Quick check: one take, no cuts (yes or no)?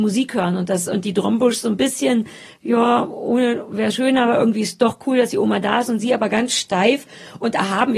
no